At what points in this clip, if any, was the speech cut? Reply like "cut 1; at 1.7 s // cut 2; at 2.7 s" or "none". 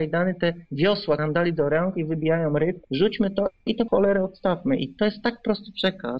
cut 1; at 1.2 s // cut 2; at 2.8 s // cut 3; at 3.9 s